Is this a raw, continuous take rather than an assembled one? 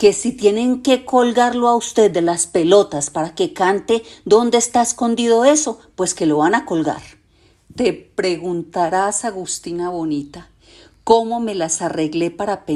yes; 0 cuts

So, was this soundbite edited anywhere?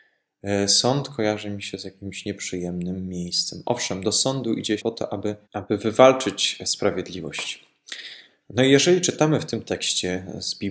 yes; 2 cuts; at 4.8 s, 5.4 s

